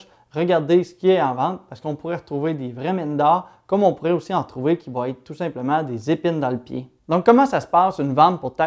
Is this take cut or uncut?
cut